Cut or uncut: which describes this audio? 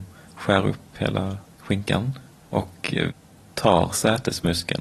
uncut